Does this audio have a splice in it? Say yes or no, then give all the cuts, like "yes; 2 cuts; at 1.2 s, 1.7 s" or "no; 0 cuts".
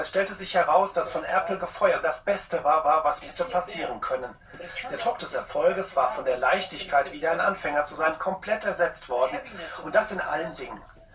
yes; 3 cuts; at 2.0 s, 2.8 s, 3.2 s